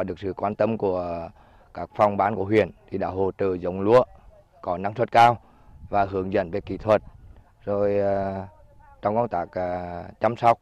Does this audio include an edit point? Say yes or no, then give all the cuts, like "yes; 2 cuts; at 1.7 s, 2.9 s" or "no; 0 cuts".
no; 0 cuts